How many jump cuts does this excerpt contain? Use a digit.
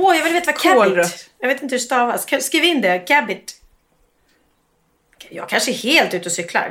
0